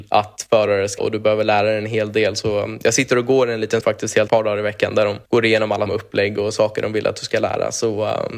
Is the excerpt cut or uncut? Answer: cut